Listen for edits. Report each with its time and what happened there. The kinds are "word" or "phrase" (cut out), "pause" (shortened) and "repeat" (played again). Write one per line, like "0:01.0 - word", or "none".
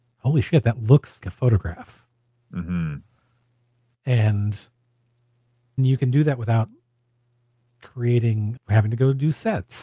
0:01.2 - word
0:05.8 - word
0:08.6 - word